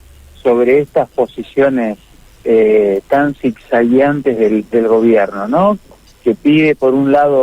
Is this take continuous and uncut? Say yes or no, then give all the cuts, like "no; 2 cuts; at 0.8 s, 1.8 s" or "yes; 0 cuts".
yes; 0 cuts